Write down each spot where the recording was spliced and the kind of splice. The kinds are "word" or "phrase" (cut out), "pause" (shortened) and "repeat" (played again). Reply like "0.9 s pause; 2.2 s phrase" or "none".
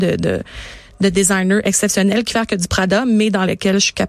2.3 s phrase